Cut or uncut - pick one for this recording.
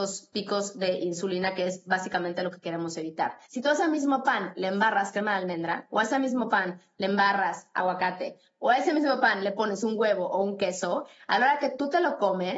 cut